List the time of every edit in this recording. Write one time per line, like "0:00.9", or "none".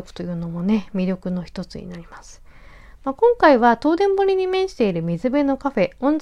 none